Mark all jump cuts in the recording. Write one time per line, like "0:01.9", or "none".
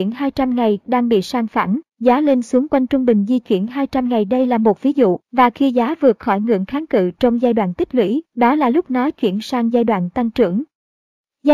0:01.9
0:05.2
0:08.3